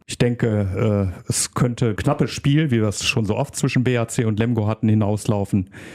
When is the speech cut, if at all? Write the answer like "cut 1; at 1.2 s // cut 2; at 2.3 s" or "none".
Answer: cut 1; at 2.0 s